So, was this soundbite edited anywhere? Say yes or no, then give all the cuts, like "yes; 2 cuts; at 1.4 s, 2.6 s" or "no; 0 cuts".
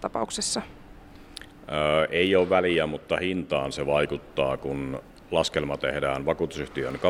no; 0 cuts